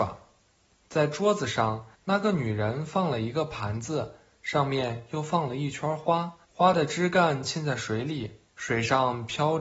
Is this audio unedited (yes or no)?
no